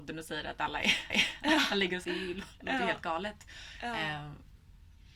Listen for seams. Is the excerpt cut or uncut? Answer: cut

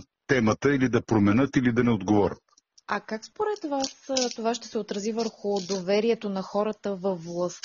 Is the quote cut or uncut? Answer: uncut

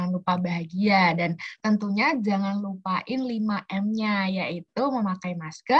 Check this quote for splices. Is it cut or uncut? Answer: uncut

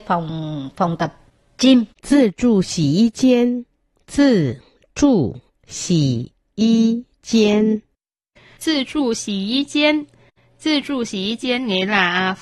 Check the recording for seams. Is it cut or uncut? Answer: cut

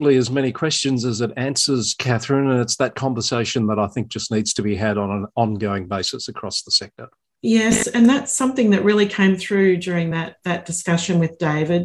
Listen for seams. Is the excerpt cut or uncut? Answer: uncut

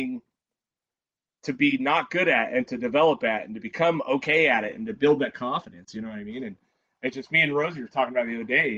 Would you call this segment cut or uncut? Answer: uncut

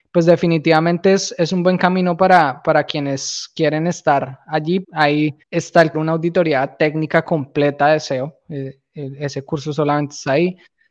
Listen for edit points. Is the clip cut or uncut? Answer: cut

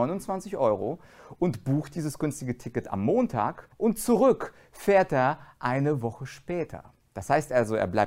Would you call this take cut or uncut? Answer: cut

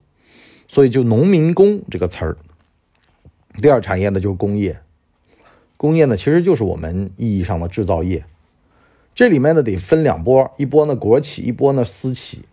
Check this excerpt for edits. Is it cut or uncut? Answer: uncut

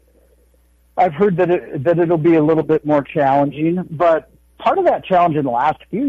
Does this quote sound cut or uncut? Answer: uncut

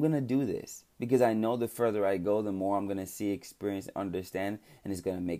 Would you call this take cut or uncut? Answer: cut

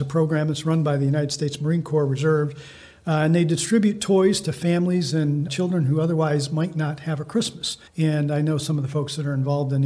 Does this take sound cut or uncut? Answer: cut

